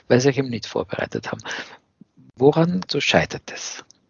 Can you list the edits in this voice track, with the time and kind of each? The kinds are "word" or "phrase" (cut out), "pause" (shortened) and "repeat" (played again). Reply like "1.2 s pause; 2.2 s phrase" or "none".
2.9 s word